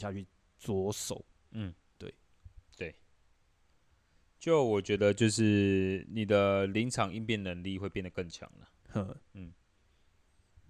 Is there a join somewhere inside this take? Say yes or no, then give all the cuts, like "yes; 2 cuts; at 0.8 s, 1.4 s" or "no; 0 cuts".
no; 0 cuts